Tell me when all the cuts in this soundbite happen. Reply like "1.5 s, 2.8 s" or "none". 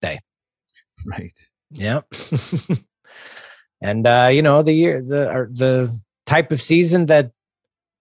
none